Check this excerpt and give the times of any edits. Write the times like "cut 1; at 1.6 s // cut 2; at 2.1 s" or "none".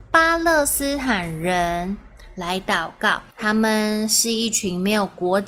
cut 1; at 3.3 s